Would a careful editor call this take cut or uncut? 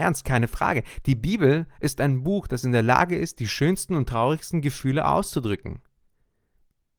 uncut